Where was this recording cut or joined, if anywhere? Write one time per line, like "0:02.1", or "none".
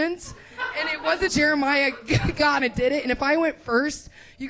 0:01.3
0:02.6

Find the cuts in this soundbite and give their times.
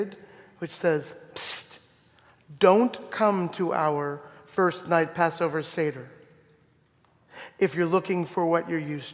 none

